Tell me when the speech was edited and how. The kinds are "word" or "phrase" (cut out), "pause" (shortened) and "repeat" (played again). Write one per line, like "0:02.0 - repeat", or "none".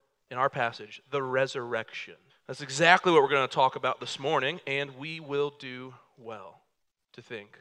0:02.3 - pause